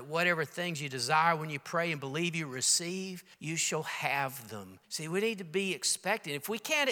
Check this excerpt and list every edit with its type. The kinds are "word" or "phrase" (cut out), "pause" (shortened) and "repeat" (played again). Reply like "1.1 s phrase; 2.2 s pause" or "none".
3.3 s pause; 4.8 s pause